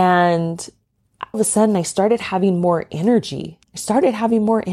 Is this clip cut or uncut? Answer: cut